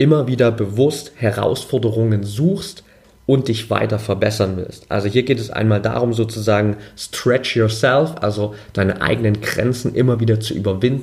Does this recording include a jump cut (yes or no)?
no